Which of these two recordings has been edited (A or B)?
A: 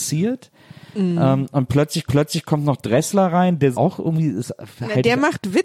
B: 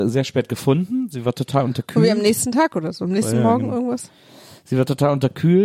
A